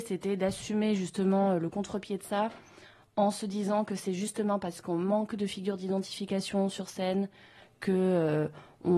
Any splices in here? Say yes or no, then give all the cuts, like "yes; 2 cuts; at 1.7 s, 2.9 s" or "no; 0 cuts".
no; 0 cuts